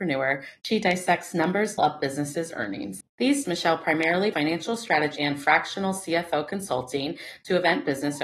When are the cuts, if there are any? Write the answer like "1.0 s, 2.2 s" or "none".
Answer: 1.8 s, 3.4 s, 4.3 s, 5.2 s